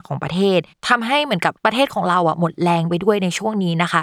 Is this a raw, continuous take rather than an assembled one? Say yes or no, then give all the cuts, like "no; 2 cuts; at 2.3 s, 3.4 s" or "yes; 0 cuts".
no; 1 cut; at 1.6 s